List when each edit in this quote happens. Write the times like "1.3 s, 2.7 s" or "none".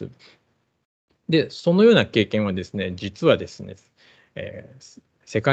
none